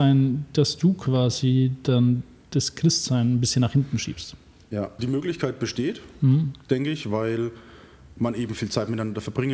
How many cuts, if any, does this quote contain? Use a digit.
1